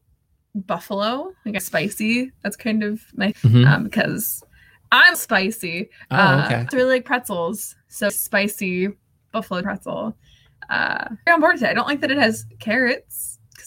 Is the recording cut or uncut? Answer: cut